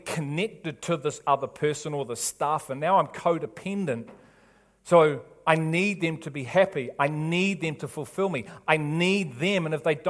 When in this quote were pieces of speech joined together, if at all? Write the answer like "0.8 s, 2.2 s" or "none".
none